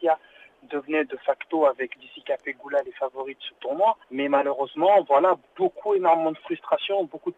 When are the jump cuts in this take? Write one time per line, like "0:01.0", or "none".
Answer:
0:04.0